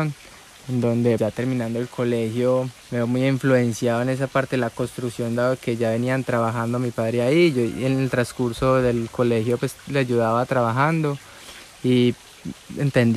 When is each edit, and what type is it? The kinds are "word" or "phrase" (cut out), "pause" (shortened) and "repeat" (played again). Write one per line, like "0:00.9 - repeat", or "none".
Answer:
0:01.2 - word
0:02.8 - pause